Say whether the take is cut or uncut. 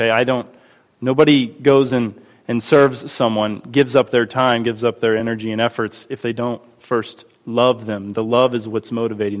uncut